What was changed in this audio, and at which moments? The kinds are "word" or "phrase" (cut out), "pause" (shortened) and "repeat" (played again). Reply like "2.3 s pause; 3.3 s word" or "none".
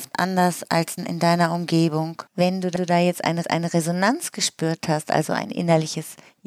1.0 s phrase; 2.3 s pause; 2.8 s repeat; 3.4 s repeat